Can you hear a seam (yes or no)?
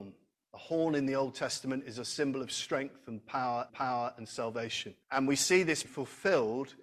yes